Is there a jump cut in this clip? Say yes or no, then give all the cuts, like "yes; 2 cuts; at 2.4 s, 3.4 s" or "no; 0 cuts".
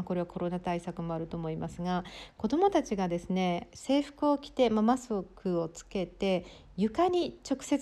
no; 0 cuts